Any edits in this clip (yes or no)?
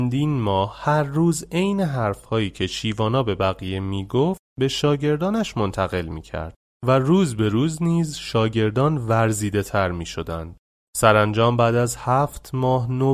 no